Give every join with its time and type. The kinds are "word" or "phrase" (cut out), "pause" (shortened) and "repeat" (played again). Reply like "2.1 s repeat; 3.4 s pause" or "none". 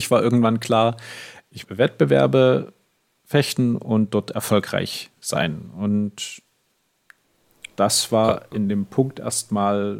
1.6 s word